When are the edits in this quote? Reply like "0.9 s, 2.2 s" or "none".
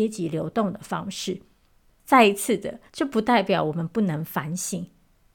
2.9 s